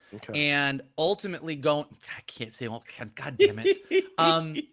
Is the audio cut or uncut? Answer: uncut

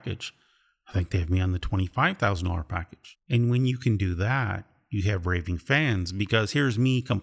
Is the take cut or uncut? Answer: uncut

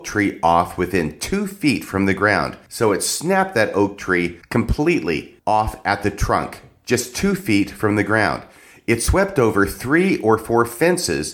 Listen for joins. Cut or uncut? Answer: uncut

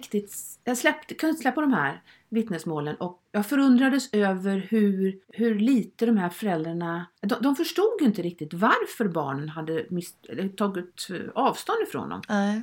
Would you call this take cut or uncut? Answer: cut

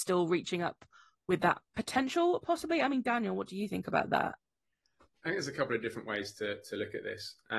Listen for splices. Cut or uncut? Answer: uncut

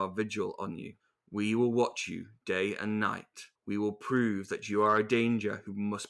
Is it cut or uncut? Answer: cut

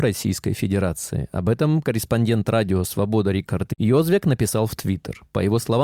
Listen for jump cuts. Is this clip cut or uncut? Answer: uncut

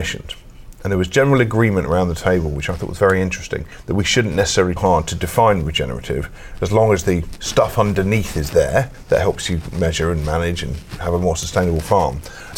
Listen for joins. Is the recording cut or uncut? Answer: cut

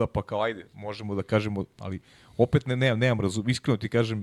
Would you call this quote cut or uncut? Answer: uncut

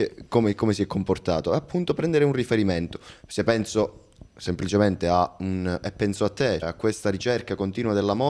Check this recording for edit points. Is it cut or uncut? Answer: cut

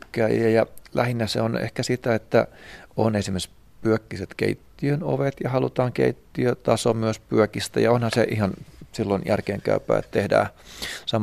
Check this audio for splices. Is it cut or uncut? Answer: uncut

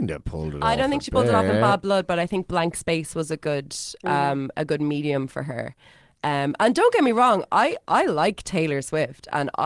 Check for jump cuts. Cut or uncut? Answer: uncut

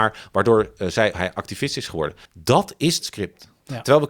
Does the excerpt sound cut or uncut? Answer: cut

